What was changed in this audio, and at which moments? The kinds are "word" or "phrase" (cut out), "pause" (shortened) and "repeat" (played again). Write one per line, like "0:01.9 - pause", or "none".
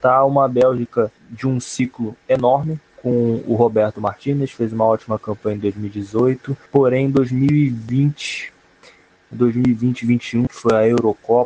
0:01.2 - pause
0:06.7 - pause
0:10.5 - word